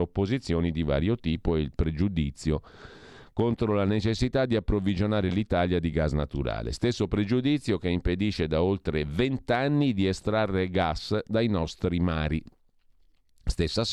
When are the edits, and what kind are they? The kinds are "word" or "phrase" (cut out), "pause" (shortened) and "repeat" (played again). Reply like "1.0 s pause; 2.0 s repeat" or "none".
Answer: none